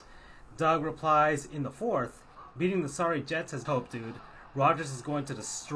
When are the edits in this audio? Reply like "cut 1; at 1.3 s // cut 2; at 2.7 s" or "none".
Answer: cut 1; at 3.6 s